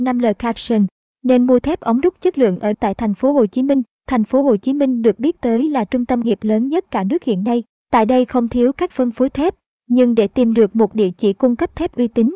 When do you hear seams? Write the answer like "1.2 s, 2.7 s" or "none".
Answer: 2.7 s, 6.2 s, 8.9 s